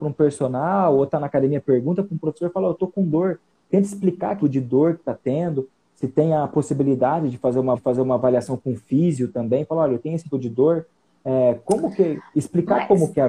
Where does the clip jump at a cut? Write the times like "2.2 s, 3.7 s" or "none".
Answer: 4.4 s, 7.7 s, 10.3 s, 12.3 s